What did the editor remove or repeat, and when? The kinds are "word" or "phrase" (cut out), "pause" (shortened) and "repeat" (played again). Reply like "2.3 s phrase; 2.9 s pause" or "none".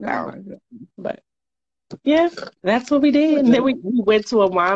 0.9 s pause; 2.6 s pause